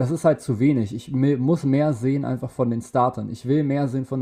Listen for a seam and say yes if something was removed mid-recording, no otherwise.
no